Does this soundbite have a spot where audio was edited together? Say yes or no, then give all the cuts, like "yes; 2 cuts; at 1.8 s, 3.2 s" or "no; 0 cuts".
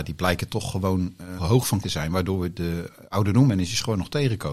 yes; 2 cuts; at 1.4 s, 1.8 s